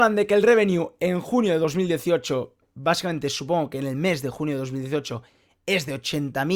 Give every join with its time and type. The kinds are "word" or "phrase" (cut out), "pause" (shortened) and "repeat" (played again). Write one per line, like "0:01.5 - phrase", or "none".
none